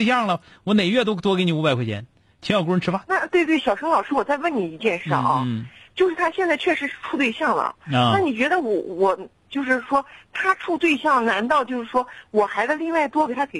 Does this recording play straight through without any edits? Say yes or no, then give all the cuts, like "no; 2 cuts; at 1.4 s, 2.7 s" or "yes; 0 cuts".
yes; 0 cuts